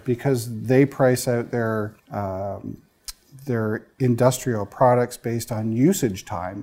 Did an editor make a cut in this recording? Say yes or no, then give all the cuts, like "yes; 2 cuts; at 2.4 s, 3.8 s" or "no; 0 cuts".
yes; 2 cuts; at 2.0 s, 3.9 s